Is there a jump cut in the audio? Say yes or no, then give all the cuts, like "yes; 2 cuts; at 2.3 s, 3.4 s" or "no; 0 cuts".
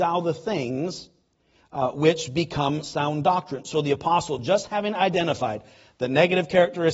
no; 0 cuts